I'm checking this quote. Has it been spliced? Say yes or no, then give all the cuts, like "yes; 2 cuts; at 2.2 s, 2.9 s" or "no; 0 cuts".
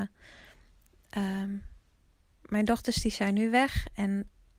no; 0 cuts